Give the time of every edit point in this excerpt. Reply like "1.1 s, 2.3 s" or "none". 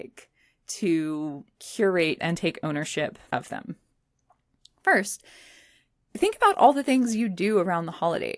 2.2 s